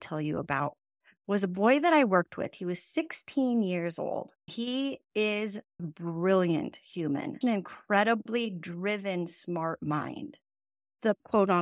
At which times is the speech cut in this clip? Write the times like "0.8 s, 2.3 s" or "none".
4.5 s, 5.8 s, 7.4 s